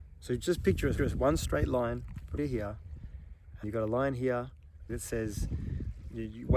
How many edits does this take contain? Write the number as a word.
four